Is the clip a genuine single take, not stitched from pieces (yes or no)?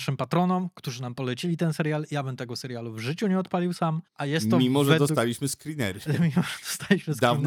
no